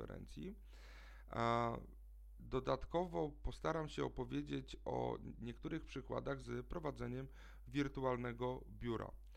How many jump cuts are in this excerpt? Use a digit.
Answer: 1